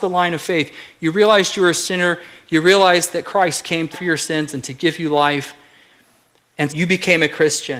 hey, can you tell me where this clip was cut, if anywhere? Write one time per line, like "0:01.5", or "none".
0:03.9
0:06.7